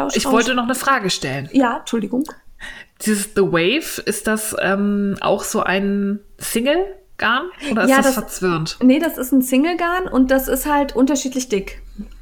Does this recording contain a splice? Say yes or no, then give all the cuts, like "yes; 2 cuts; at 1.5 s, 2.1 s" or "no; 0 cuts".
no; 0 cuts